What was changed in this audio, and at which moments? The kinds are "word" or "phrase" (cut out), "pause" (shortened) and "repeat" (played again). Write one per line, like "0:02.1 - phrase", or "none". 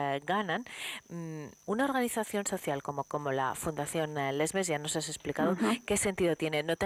0:01.6 - pause
0:03.0 - word